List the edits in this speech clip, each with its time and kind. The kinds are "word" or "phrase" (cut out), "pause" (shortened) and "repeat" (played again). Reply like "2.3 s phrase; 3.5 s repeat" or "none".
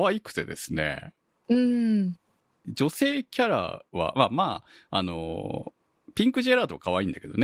none